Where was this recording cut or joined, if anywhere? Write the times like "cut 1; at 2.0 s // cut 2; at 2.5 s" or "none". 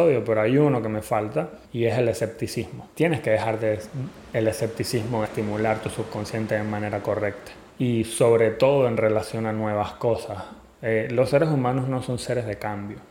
cut 1; at 1.6 s // cut 2; at 2.9 s // cut 3; at 5.2 s // cut 4; at 7.7 s